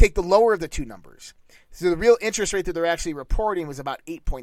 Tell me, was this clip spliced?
no; 0 cuts

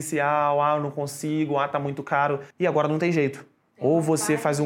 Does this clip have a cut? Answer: yes; 1 cut; at 2.5 s

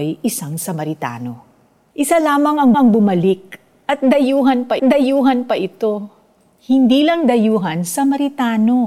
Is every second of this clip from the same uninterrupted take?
no; 2 cuts; at 2.7 s, 4.8 s

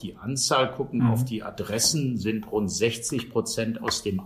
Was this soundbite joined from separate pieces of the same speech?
no; 0 cuts

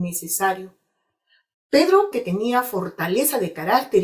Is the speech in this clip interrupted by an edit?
yes; 1 cut; at 2.1 s

